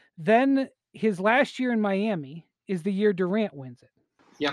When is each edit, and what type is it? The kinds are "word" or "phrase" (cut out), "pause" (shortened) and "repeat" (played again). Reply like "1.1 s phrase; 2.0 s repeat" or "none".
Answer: 2.6 s pause